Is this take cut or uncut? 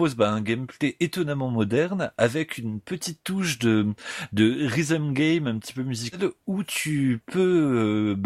uncut